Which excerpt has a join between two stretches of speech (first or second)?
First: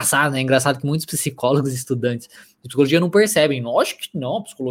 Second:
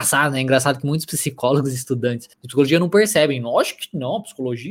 second